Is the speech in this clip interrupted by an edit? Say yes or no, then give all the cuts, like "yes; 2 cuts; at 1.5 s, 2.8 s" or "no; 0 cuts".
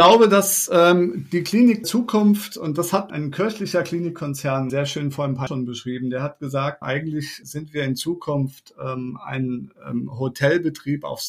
yes; 6 cuts; at 1.8 s, 3.1 s, 4.7 s, 5.5 s, 6.8 s, 7.4 s